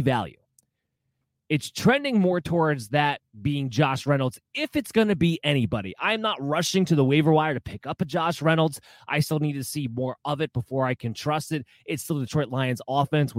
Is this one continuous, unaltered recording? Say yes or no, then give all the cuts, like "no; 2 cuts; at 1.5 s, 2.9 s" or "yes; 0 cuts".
yes; 0 cuts